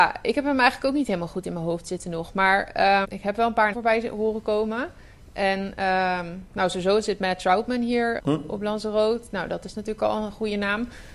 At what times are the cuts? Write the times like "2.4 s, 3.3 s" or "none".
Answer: 3.0 s, 3.7 s, 8.2 s